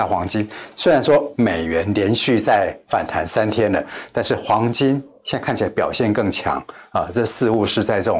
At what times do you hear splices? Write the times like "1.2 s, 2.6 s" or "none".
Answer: 1.3 s